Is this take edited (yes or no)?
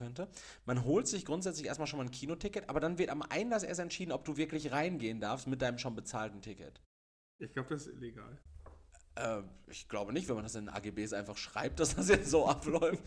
no